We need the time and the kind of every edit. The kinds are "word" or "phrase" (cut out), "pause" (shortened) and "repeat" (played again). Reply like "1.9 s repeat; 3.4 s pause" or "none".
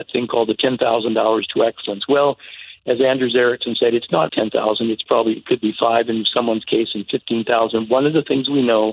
4.3 s word